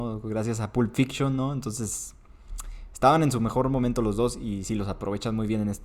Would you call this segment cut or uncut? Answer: uncut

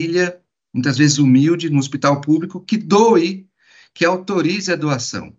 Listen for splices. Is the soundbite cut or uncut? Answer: uncut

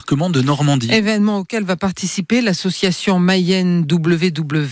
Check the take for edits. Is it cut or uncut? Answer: uncut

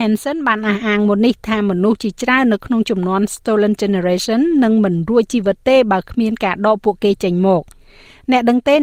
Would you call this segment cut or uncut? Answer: uncut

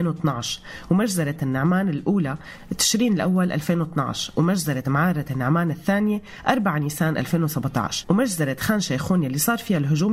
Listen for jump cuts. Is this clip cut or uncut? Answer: cut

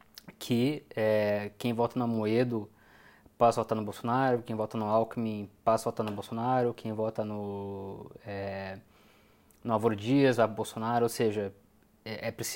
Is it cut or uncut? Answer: uncut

